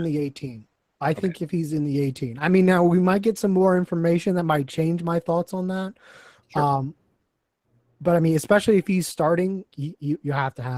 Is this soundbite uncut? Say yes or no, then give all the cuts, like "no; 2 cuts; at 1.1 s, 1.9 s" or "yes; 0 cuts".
no; 1 cut; at 9.7 s